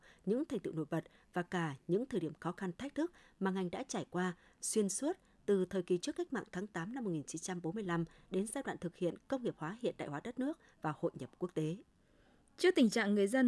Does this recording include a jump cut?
no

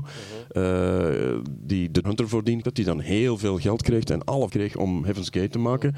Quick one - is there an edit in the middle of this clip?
yes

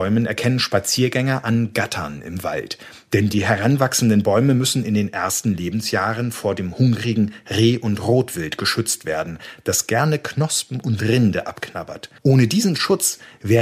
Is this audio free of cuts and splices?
no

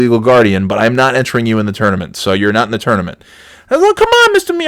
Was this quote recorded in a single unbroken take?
yes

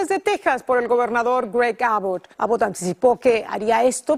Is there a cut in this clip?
yes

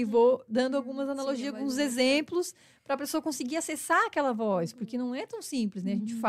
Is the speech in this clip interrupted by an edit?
no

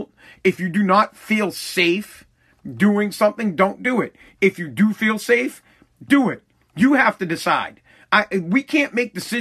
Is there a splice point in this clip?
no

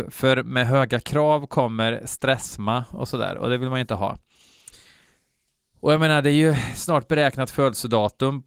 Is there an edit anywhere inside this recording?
no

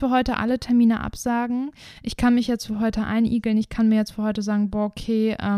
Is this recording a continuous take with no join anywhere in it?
yes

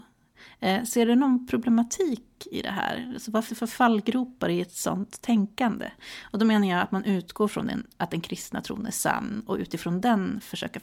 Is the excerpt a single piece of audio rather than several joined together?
no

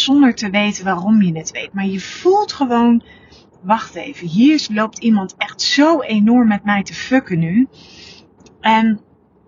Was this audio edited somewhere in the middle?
no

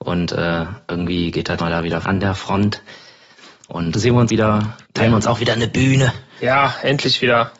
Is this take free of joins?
no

